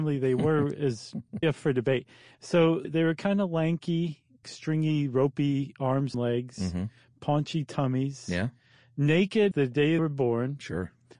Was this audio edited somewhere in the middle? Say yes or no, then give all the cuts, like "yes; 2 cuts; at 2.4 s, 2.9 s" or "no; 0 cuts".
yes; 6 cuts; at 1.4 s, 2.8 s, 4.4 s, 6.1 s, 9.5 s, 10.0 s